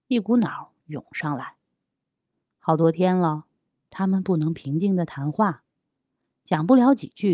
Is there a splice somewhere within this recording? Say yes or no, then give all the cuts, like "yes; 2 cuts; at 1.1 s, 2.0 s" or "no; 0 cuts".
no; 0 cuts